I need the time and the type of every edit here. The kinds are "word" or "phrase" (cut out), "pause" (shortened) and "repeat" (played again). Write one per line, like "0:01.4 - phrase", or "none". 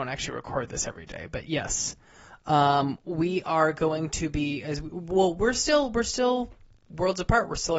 none

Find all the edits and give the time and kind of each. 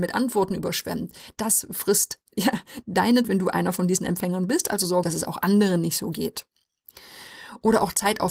0:02.8 - word
0:03.2 - word
0:05.0 - word

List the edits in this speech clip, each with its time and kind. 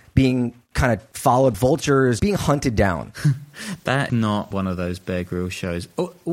0:01.5 - word
0:02.2 - word
0:04.1 - word
0:04.5 - word

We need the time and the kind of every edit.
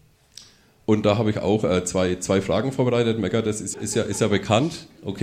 0:03.7 - word

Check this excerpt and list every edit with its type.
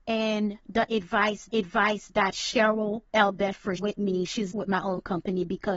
0:01.5 - repeat
0:03.1 - pause
0:03.8 - word
0:04.5 - phrase

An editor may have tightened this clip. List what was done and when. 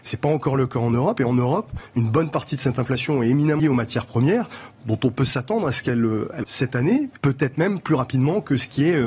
0:03.6 - word
0:06.4 - word
0:07.2 - pause

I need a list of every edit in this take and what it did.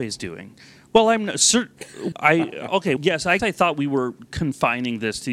0:02.1 - word
0:03.0 - word
0:03.4 - word

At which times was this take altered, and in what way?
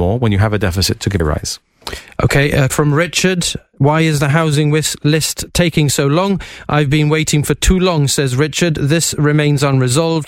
0:01.2 - phrase
0:02.7 - word

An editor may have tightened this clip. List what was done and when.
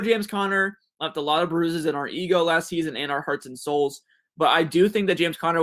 none

